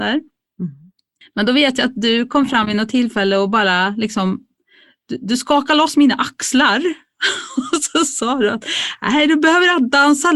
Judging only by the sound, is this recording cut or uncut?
uncut